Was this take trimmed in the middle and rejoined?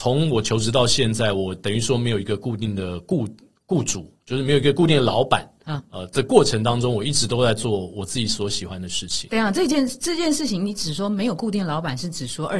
yes; 1 cut; at 5.8 s

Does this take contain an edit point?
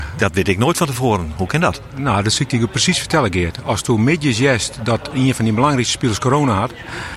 no; 0 cuts

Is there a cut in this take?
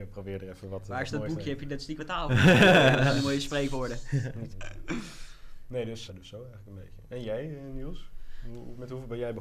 yes; 3 cuts; at 2.0 s, 4.5 s, 6.1 s

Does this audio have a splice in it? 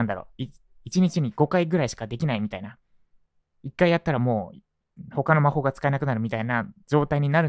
no; 0 cuts

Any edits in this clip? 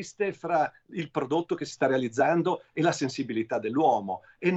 no; 0 cuts

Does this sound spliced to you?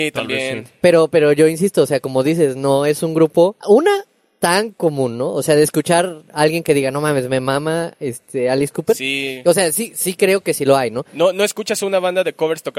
yes; 1 cut; at 3.6 s

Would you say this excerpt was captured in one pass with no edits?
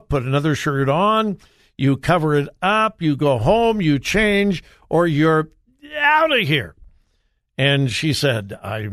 yes; 0 cuts

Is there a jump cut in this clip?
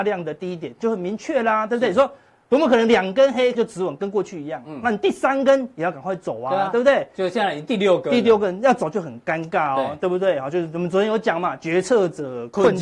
yes; 1 cut; at 3.5 s

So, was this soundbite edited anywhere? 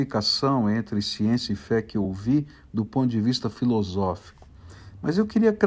no; 0 cuts

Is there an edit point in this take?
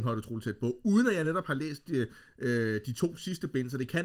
no; 0 cuts

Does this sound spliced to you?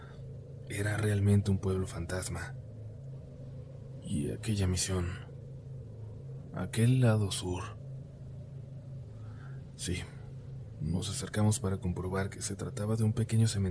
no; 0 cuts

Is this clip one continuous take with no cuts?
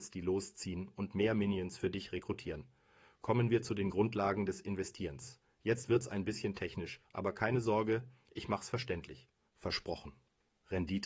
yes; 0 cuts

